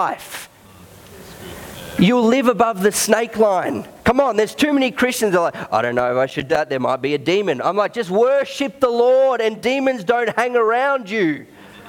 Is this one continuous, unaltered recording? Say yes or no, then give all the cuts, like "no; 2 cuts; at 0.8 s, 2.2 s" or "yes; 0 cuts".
no; 1 cut; at 6.5 s